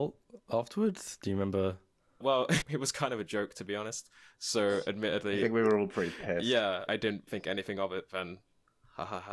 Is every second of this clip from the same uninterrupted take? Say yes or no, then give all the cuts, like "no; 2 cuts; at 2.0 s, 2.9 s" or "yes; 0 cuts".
no; 4 cuts; at 2.2 s, 2.6 s, 6.9 s, 7.3 s